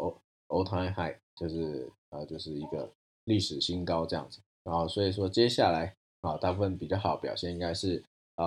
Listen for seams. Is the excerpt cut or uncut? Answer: uncut